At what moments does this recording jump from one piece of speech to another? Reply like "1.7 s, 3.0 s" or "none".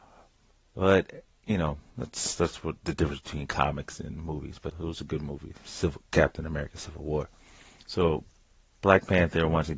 1.9 s, 4.7 s